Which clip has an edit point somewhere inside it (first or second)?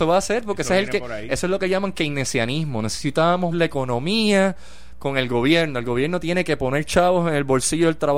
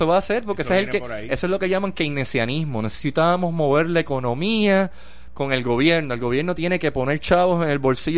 first